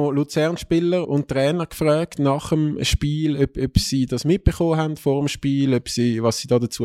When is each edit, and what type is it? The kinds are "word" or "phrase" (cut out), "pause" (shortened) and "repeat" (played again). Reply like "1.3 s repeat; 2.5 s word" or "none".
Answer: 1.0 s word